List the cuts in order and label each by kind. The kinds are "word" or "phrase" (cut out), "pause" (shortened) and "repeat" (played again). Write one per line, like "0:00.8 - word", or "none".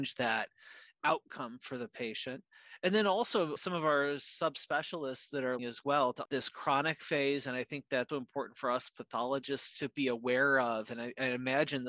0:03.6 - word
0:05.6 - word
0:06.2 - word
0:08.1 - word